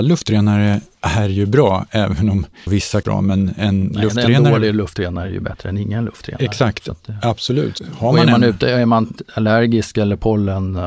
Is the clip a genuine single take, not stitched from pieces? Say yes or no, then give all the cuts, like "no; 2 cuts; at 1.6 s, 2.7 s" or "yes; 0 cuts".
no; 2 cuts; at 2.7 s, 3.0 s